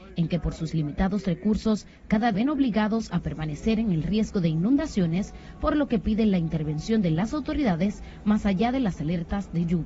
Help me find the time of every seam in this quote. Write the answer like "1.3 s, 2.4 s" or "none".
2.3 s